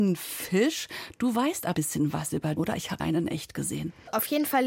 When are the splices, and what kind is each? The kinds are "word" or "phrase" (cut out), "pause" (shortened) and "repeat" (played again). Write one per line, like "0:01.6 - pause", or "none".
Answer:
0:01.7 - word
0:02.6 - word
0:03.0 - phrase